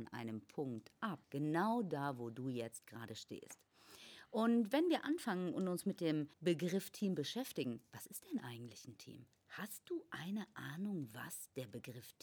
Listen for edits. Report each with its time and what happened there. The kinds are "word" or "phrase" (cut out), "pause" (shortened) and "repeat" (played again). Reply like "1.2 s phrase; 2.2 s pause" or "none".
1.2 s pause; 6.3 s pause